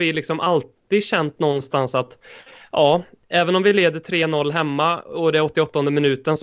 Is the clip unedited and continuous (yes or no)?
yes